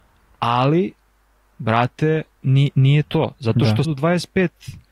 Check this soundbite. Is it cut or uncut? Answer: cut